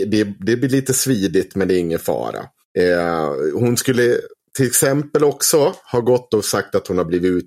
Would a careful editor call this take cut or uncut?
uncut